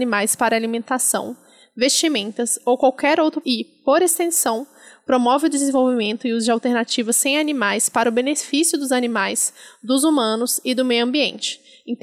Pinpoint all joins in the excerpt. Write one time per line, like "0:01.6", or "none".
0:03.4